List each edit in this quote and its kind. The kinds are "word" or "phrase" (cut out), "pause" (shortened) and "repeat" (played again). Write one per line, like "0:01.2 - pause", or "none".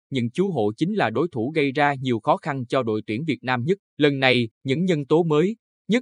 0:03.9 - pause
0:04.5 - pause